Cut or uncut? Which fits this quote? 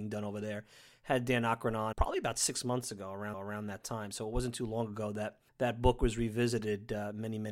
cut